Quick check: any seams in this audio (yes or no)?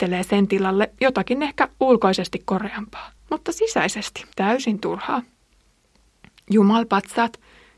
yes